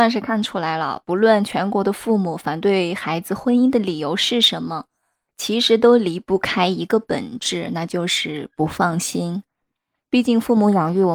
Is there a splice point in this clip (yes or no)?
no